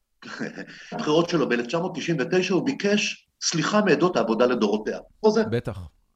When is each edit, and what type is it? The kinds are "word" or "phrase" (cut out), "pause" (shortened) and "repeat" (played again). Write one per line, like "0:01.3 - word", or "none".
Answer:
0:00.9 - word
0:02.6 - phrase
0:04.1 - phrase
0:05.2 - phrase